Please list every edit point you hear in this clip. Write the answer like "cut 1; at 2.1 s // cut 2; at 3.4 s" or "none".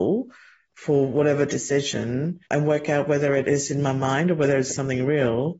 cut 1; at 2.4 s // cut 2; at 4.7 s